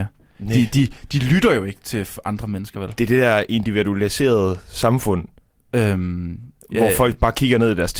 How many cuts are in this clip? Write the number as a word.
zero